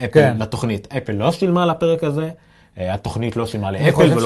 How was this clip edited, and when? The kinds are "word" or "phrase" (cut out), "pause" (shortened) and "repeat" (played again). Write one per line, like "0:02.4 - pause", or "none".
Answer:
none